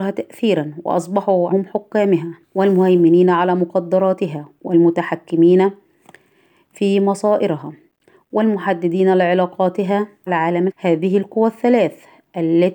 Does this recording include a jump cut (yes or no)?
yes